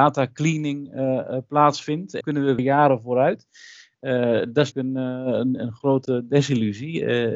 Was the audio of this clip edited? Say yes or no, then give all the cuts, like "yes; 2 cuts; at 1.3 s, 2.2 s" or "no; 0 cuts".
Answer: yes; 3 cuts; at 2.2 s, 2.6 s, 4.7 s